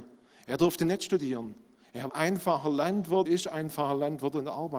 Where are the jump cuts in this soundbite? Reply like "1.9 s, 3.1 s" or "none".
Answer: 2.1 s, 3.3 s